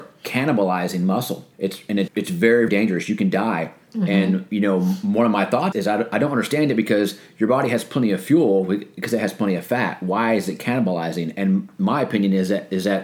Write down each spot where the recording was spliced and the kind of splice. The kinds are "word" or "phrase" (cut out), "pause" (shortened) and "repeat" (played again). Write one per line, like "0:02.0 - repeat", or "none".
0:01.5 - pause
0:02.1 - word
0:02.7 - word
0:05.7 - word